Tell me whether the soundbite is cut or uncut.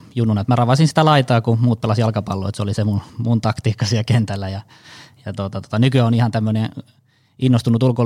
cut